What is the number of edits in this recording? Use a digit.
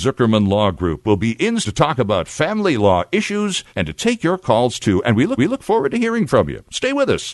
3